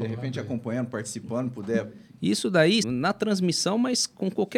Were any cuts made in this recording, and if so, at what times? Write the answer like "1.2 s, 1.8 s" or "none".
2.8 s